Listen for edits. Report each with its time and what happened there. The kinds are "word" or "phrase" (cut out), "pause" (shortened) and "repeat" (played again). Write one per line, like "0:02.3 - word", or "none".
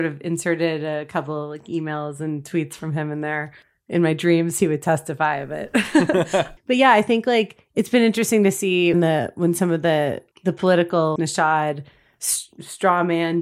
0:06.6 - word
0:08.9 - word
0:10.3 - word
0:11.2 - word